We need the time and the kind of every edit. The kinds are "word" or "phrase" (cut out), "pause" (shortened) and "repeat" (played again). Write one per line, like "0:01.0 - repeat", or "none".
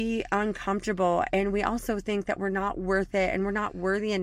none